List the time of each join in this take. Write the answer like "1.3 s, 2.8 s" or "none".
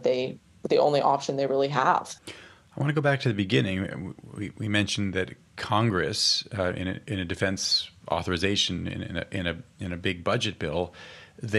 2.2 s